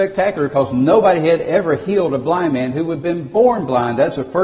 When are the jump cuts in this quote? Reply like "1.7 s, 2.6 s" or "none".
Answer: none

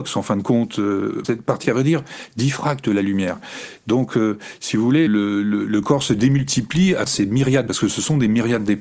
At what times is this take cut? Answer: 1.2 s, 1.6 s, 5.1 s, 7.1 s, 7.7 s

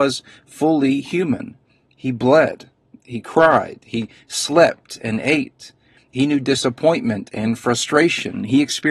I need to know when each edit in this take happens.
none

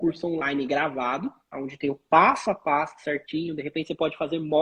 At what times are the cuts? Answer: none

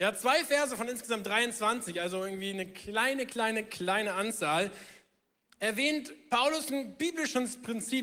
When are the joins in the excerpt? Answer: none

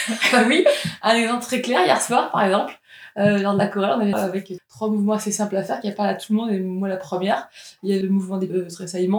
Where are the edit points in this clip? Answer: 4.1 s, 4.6 s, 8.0 s

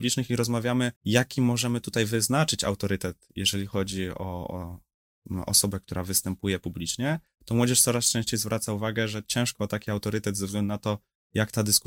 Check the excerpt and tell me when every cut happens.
1.0 s

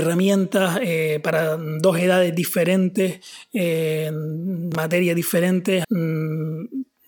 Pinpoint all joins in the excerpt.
5.8 s

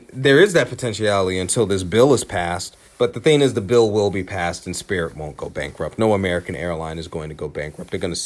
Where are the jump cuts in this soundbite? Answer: 2.9 s

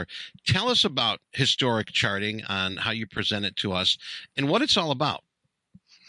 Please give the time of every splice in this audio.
1.3 s

